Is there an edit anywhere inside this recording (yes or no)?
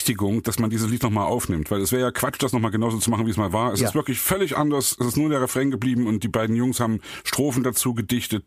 no